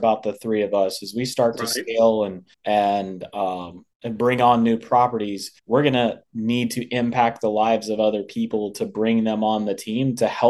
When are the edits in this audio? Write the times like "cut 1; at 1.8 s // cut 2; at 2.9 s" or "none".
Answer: cut 1; at 2.5 s // cut 2; at 3.9 s // cut 3; at 5.6 s